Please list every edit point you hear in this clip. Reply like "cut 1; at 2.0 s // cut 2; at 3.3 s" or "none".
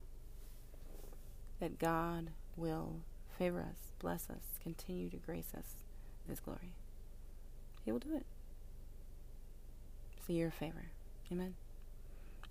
cut 1; at 6.3 s